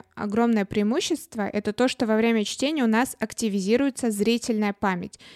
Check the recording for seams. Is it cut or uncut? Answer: uncut